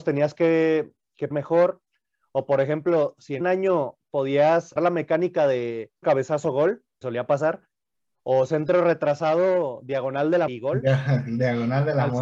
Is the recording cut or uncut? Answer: cut